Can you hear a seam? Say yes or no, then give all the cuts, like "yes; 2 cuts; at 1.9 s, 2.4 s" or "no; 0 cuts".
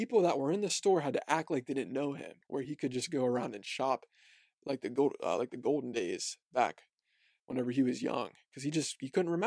no; 0 cuts